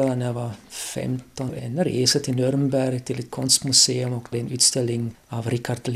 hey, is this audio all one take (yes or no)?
no